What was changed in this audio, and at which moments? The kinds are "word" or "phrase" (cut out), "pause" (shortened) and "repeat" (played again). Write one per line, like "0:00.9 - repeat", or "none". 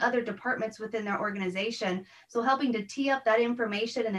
none